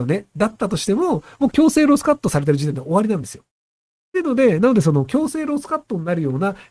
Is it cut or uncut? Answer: uncut